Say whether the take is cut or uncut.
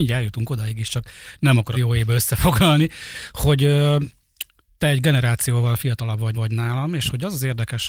cut